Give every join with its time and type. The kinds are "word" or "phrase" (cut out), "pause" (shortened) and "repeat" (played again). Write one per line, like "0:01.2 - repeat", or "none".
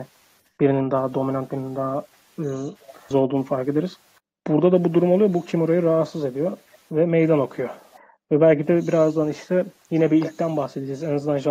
0:03.1 - word